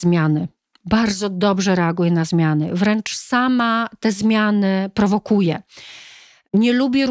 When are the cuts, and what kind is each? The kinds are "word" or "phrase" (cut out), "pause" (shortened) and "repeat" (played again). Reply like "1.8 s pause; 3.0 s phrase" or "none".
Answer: none